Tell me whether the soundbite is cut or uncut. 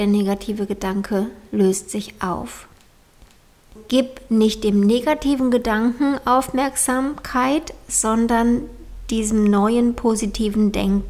uncut